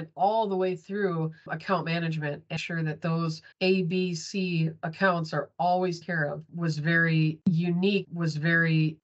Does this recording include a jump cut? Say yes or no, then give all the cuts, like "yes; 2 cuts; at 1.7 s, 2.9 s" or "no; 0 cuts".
yes; 4 cuts; at 2.6 s, 3.5 s, 6.0 s, 8.0 s